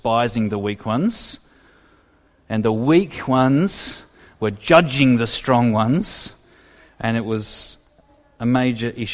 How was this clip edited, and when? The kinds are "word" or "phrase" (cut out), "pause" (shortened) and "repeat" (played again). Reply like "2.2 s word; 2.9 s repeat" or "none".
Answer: none